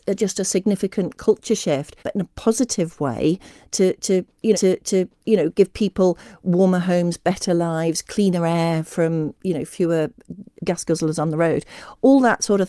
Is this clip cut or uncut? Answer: cut